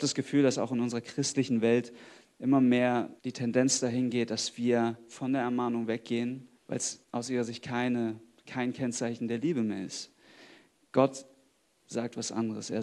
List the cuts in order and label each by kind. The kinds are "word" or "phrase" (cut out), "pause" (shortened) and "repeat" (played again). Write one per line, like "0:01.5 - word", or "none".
0:03.2 - pause
0:06.6 - pause
0:07.0 - pause